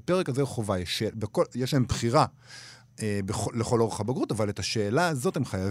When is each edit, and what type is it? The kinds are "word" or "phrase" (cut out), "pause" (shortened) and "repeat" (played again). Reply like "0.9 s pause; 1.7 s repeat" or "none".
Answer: none